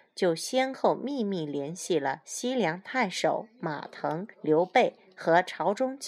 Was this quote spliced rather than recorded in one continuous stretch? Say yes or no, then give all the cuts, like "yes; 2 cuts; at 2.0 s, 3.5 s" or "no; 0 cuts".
yes; 1 cut; at 4.3 s